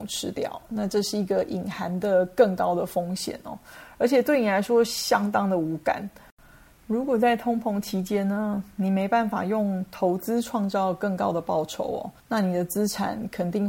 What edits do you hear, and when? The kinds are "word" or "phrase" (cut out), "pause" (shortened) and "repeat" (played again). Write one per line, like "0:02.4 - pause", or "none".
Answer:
0:12.2 - pause